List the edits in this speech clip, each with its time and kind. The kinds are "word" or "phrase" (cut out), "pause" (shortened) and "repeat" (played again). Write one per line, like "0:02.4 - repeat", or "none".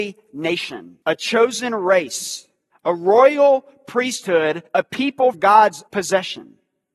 0:01.0 - pause
0:02.7 - pause
0:04.7 - pause
0:05.3 - word
0:05.9 - word